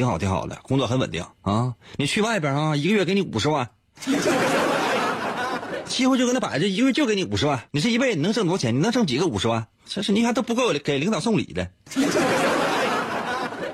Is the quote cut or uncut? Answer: cut